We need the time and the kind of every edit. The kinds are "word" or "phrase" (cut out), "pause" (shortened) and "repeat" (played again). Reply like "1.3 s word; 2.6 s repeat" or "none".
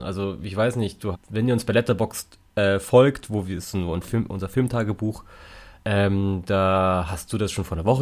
1.1 s word